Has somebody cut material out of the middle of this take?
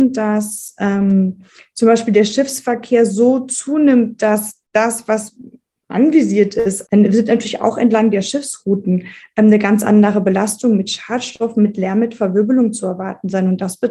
no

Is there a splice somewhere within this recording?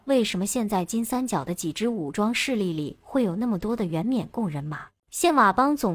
yes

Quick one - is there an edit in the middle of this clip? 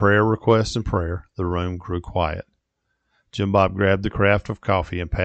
no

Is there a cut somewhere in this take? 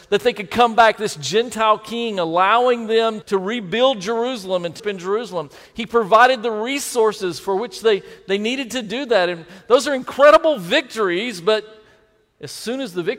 yes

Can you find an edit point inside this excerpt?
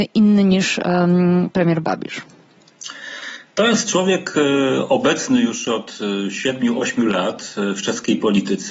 no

